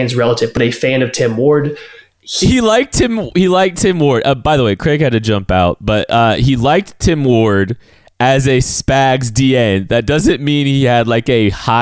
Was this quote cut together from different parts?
no; 0 cuts

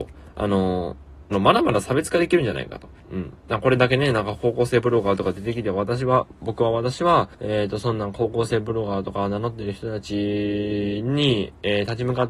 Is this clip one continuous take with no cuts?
no; 3 cuts; at 1.3 s, 3.0 s, 7.3 s

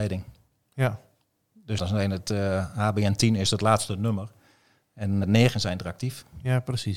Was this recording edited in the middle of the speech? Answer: yes; 2 cuts; at 1.8 s, 5.2 s

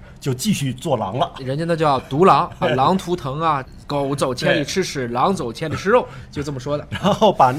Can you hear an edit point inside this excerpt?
yes; 1 cut; at 2.6 s

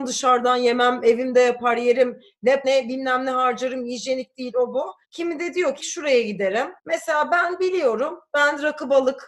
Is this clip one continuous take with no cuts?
no; 4 cuts; at 2.6 s, 5.0 s, 5.8 s, 6.8 s

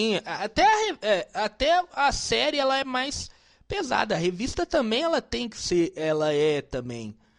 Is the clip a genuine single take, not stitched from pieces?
yes; 0 cuts

